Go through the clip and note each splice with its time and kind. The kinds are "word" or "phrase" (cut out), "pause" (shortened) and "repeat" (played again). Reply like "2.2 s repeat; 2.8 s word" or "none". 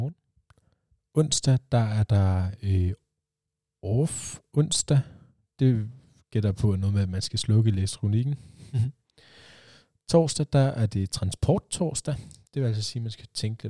none